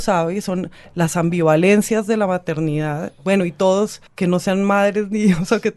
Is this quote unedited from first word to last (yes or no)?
no